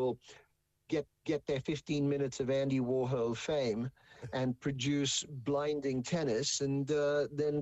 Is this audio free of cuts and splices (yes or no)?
no